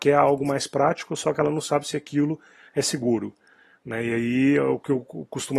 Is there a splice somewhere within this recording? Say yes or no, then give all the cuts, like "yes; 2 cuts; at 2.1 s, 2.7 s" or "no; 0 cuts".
no; 0 cuts